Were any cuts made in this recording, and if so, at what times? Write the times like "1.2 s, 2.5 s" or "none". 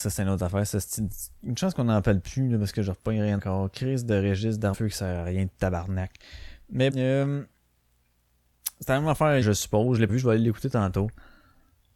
3.4 s, 4.7 s, 6.9 s, 9.4 s, 10.1 s